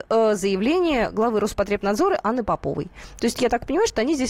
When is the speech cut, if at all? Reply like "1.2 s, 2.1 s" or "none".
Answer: 3.3 s